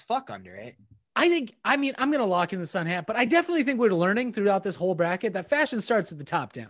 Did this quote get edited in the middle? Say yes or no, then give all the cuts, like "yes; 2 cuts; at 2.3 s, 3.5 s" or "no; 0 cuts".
no; 0 cuts